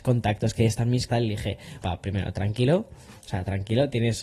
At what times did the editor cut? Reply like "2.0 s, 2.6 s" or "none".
1.1 s, 1.8 s